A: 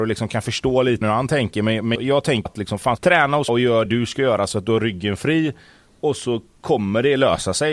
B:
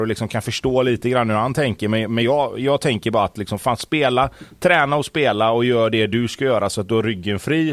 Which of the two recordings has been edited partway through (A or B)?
A